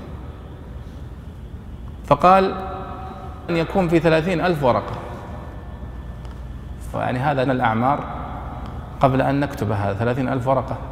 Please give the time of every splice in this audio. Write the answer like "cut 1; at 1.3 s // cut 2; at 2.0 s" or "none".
cut 1; at 3.5 s // cut 2; at 6.9 s // cut 3; at 7.5 s